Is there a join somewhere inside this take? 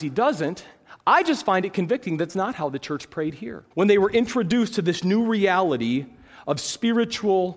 yes; 2 cuts; at 2.3 s, 3.7 s

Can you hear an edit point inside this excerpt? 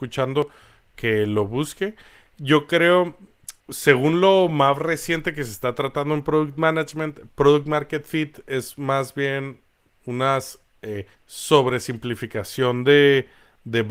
yes; 2 cuts; at 3.6 s, 11.1 s

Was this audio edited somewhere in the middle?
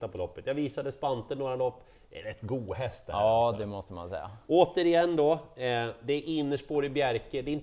no; 0 cuts

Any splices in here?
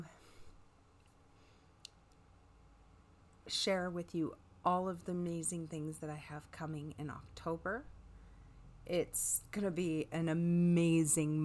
no; 0 cuts

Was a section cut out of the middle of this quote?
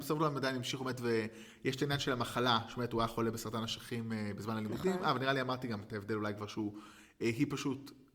no; 0 cuts

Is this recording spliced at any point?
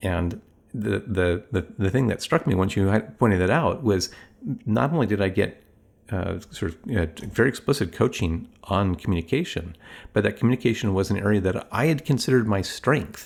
no; 0 cuts

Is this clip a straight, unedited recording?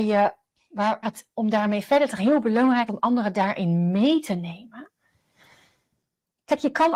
no; 4 cuts; at 1.0 s, 1.4 s, 2.2 s, 2.9 s

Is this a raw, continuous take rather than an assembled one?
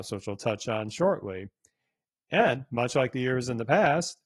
yes; 0 cuts

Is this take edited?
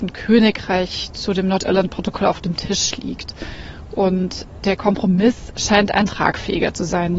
no; 0 cuts

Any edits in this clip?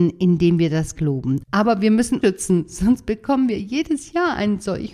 yes; 2 cuts; at 0.9 s, 2.2 s

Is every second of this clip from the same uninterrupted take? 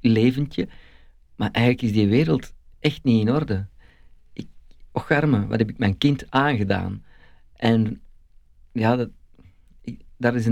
yes; 0 cuts

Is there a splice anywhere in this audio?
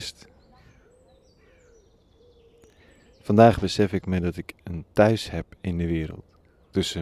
no; 0 cuts

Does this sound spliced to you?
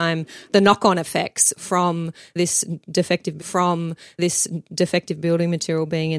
yes; 1 cut; at 3.4 s

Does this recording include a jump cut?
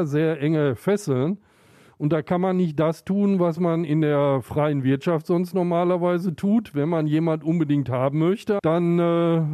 no; 0 cuts

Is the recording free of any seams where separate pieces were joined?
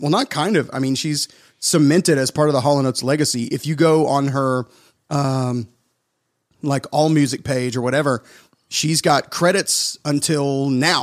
yes; 0 cuts

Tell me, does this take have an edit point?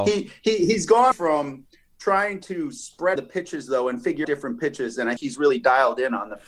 yes; 4 cuts; at 1.1 s, 3.2 s, 4.2 s, 5.2 s

